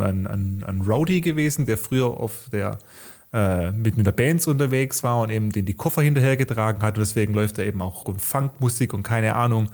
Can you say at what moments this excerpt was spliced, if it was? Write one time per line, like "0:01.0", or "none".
0:08.0